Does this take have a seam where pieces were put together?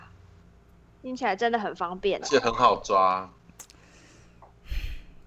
yes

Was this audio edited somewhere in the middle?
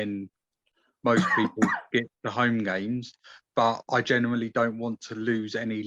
no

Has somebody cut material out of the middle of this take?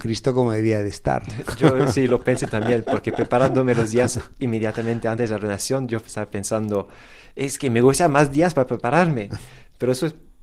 no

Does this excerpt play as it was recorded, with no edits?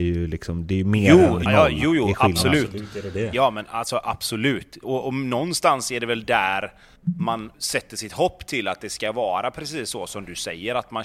no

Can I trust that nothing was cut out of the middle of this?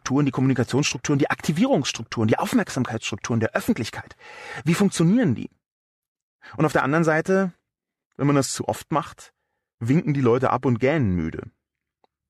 yes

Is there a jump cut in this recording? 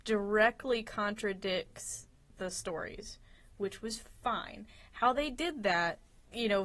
no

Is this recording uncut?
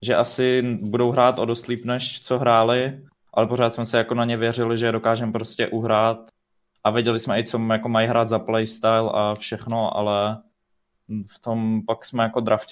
yes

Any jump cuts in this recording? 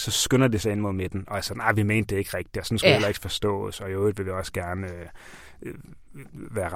no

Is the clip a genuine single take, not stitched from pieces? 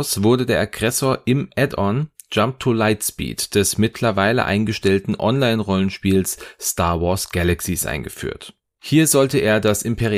yes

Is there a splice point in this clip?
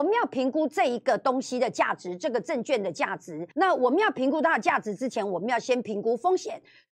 yes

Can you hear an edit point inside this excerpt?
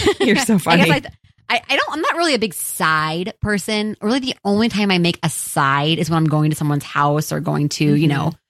no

